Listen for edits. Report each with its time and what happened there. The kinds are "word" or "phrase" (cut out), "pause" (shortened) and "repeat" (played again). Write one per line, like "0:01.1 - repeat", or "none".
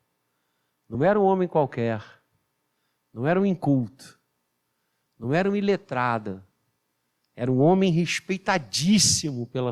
none

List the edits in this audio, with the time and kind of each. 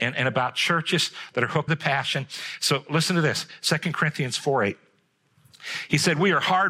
0:01.7 - word

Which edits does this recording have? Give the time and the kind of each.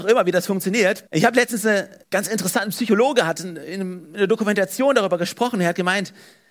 0:01.1 - pause
0:02.0 - pause

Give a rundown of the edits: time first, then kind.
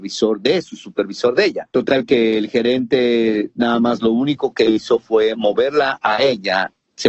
none

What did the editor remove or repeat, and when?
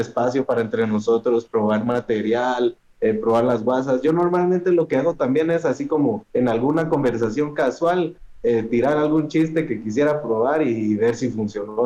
0:06.3 - pause

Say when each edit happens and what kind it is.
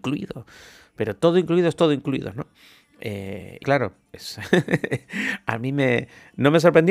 0:03.6 - word
0:04.1 - word

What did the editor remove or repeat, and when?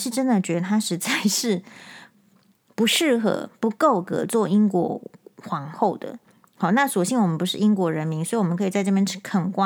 none

